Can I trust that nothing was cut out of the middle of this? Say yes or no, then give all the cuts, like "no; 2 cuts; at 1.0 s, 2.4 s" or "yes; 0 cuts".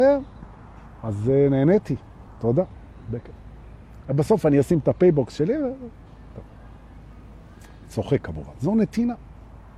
yes; 0 cuts